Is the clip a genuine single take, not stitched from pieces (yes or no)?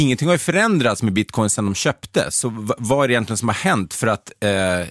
yes